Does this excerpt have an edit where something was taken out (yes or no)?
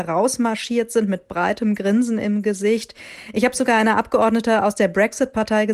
no